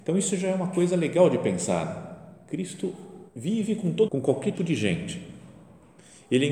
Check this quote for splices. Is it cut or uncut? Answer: cut